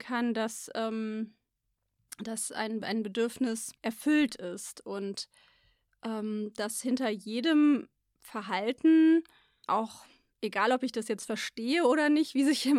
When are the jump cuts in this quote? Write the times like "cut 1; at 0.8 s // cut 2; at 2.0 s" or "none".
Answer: cut 1; at 3.8 s // cut 2; at 9.6 s